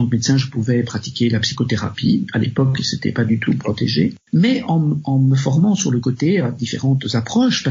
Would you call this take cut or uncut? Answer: uncut